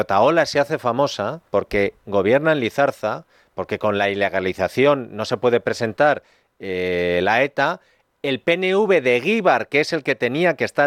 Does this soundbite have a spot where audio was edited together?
yes; 1 cut; at 1.5 s

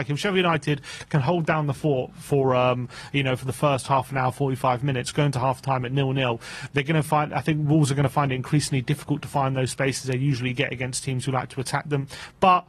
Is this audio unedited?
yes; 0 cuts

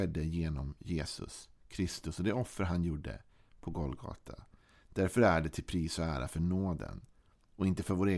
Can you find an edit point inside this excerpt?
no; 0 cuts

